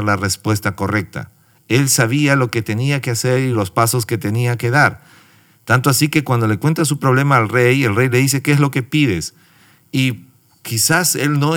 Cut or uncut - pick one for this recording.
uncut